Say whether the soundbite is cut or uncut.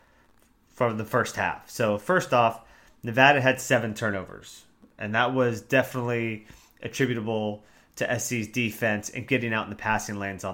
uncut